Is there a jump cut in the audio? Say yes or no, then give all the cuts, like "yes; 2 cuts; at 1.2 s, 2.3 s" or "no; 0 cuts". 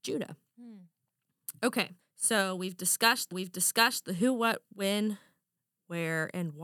yes; 2 cuts; at 2.0 s, 3.3 s